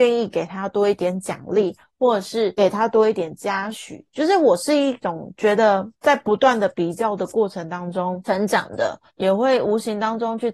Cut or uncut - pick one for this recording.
cut